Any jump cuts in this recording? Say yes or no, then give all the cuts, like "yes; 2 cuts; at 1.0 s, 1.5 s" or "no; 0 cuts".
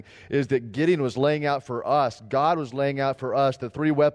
no; 0 cuts